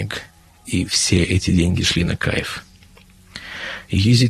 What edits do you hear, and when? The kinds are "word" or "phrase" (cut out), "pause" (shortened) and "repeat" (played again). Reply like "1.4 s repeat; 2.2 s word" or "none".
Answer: none